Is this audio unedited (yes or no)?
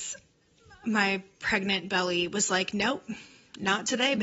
yes